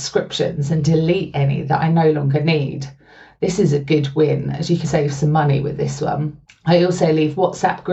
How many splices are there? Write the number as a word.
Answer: two